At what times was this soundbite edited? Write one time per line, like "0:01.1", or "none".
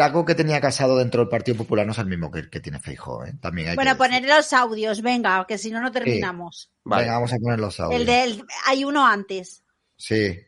none